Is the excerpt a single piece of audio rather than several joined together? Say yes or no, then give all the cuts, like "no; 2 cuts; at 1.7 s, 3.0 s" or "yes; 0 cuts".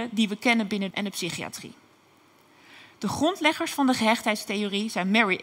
no; 1 cut; at 0.9 s